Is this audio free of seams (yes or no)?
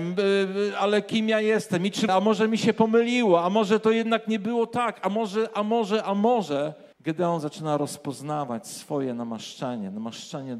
no